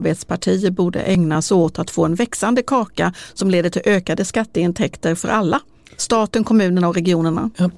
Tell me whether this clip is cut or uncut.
uncut